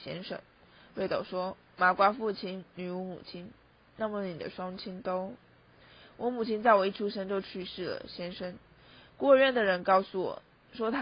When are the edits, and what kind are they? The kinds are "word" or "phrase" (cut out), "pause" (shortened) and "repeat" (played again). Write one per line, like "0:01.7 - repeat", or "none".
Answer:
none